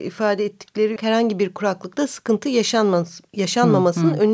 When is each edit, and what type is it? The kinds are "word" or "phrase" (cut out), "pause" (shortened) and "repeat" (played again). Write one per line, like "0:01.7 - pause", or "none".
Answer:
0:01.0 - phrase